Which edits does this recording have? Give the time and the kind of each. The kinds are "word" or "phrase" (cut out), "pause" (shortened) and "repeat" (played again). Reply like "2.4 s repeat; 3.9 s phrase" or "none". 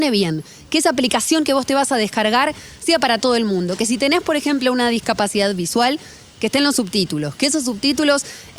none